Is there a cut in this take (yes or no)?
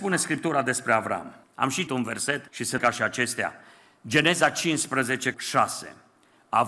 yes